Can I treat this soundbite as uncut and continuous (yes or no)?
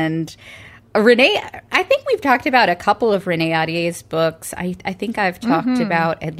yes